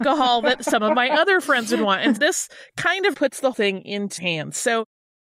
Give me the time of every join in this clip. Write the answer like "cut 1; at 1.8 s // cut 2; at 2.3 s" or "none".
cut 1; at 2.2 s // cut 2; at 3.1 s // cut 3; at 3.5 s // cut 4; at 4.2 s